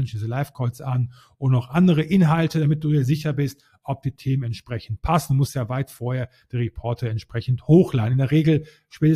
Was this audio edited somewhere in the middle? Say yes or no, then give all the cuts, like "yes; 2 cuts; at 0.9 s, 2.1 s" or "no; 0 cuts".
no; 0 cuts